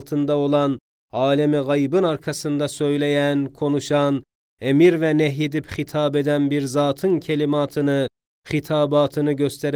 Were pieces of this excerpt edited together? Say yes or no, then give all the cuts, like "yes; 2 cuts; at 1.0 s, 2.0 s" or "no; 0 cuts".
no; 0 cuts